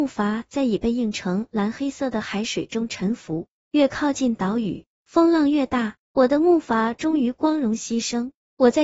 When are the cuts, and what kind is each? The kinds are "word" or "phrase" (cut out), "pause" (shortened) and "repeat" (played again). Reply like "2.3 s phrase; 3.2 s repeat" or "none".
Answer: 6.0 s pause